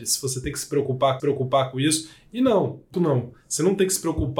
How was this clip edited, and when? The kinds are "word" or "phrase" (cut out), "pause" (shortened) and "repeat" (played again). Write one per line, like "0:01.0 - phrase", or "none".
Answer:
0:01.2 - repeat
0:02.9 - word